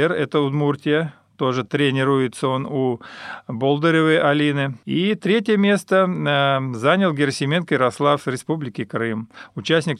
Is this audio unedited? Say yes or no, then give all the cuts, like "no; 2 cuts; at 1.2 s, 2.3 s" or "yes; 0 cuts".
yes; 0 cuts